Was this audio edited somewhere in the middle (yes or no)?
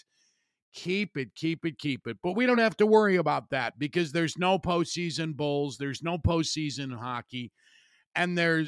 no